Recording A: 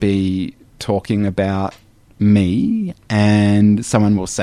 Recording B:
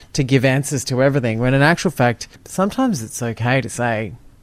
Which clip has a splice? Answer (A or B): B